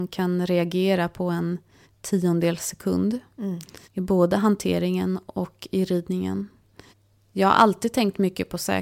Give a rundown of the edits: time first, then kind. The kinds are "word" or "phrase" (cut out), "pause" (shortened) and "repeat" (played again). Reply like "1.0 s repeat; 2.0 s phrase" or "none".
1.8 s pause; 3.8 s pause; 6.9 s pause